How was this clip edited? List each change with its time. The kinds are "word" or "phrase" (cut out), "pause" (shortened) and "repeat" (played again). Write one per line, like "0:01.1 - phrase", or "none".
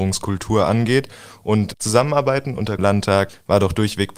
0:01.7 - word
0:02.8 - phrase